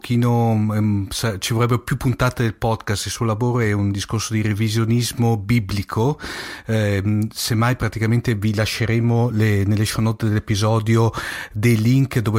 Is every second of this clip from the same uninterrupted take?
yes; 0 cuts

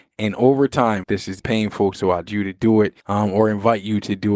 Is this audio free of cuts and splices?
no; 4 cuts; at 1.0 s, 1.4 s, 2.3 s, 3.0 s

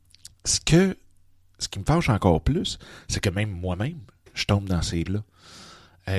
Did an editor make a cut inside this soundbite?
yes; 1 cut; at 5.1 s

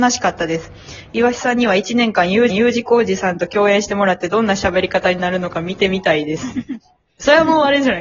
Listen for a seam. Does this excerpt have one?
yes; 1 cut; at 2.5 s

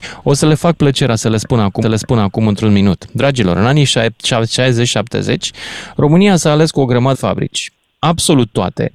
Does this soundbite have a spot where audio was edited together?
yes; 2 cuts; at 1.8 s, 7.1 s

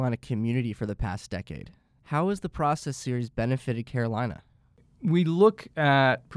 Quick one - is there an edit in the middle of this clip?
no; 0 cuts

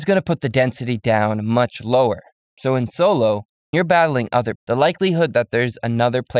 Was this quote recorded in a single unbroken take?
no; 2 cuts; at 3.7 s, 4.5 s

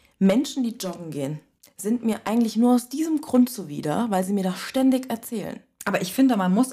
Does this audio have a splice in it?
yes; 1 cut; at 1.6 s

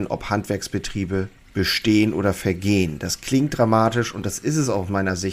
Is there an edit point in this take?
yes; 1 cut; at 1.4 s

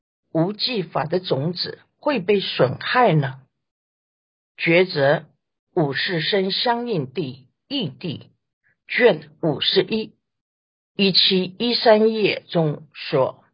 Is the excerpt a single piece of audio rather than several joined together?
yes; 0 cuts

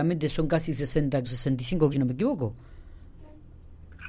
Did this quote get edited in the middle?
yes; 2 cuts; at 1.2 s, 1.9 s

